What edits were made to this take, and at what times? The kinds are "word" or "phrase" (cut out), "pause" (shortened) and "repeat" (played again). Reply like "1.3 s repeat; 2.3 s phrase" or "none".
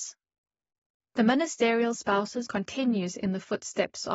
2.5 s word